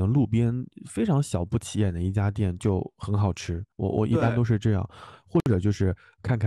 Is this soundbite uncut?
no; 1 cut; at 3.7 s

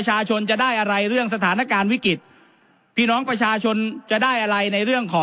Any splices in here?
no; 0 cuts

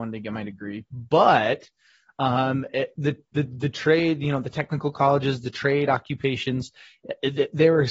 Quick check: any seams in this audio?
no; 0 cuts

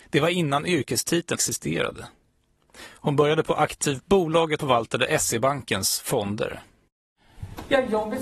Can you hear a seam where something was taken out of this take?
yes; 3 cuts; at 1.4 s, 4.0 s, 4.6 s

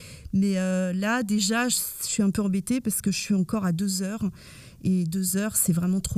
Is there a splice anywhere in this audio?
yes; 1 cut; at 1.7 s

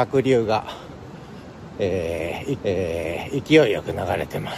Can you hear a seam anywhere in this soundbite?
yes; 1 cut; at 2.6 s

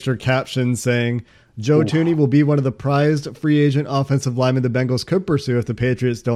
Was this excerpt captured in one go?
yes; 0 cuts

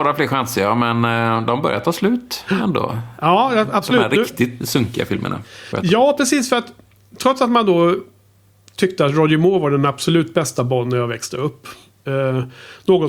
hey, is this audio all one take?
no; 1 cut; at 4.6 s

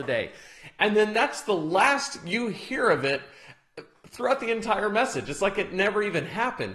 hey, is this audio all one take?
yes; 0 cuts

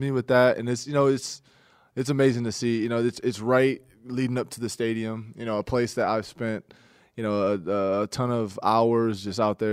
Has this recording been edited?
no; 0 cuts

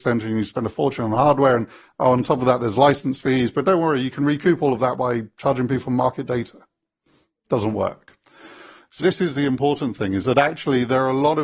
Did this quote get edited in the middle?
yes; 1 cut; at 9.0 s

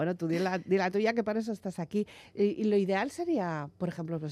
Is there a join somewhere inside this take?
no; 0 cuts

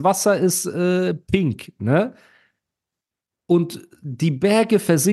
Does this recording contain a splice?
no; 0 cuts

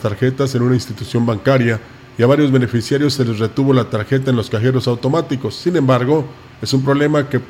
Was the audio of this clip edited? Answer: no; 0 cuts

